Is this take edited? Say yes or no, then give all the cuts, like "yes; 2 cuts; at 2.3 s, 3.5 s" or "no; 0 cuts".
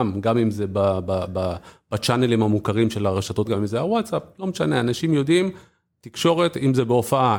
yes; 1 cut; at 3.5 s